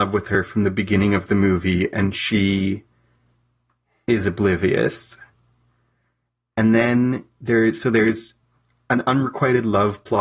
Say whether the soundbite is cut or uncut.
uncut